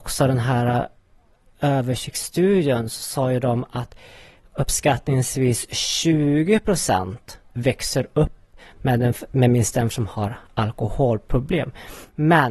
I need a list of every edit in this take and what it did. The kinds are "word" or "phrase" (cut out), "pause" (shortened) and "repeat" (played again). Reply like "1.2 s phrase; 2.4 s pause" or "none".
7.4 s pause; 9.9 s word

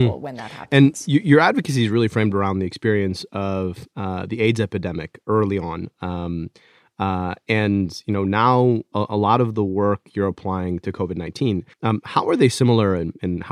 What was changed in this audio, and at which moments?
11.7 s pause

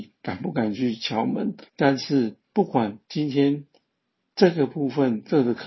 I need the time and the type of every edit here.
1.7 s pause; 2.4 s pause; 3.0 s pause

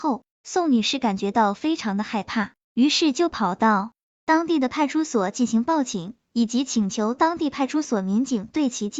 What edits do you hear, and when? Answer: none

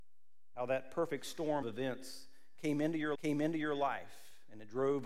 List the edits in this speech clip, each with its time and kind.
1.6 s word; 3.1 s repeat

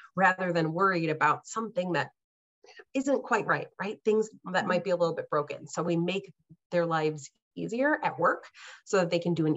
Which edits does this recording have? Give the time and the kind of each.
none

